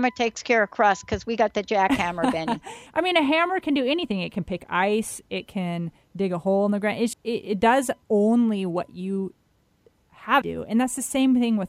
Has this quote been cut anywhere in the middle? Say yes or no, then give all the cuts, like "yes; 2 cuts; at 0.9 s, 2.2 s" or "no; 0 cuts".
yes; 4 cuts; at 2.9 s, 7.1 s, 8.0 s, 10.4 s